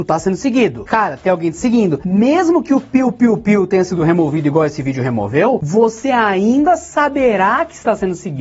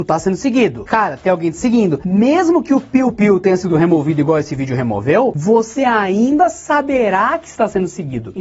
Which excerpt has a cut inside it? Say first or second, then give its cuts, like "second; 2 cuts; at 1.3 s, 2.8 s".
second; 1 cut; at 3.1 s